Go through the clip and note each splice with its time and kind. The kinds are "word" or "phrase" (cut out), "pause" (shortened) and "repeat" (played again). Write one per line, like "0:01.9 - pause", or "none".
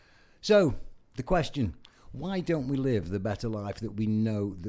none